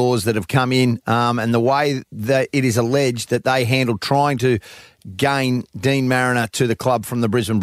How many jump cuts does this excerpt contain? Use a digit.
1